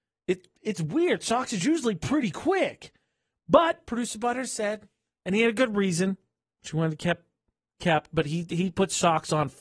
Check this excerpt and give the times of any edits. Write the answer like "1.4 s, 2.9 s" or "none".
none